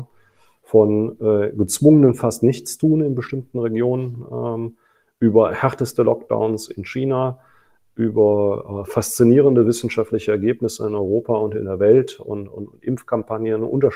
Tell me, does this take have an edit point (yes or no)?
no